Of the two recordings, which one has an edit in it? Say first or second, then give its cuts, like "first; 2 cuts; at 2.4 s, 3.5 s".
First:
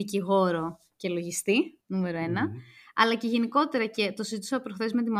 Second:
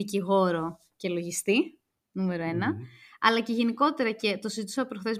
first; 1 cut; at 1.8 s